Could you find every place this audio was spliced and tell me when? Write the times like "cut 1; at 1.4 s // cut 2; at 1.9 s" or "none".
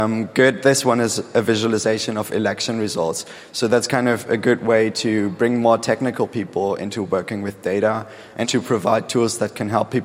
cut 1; at 8.4 s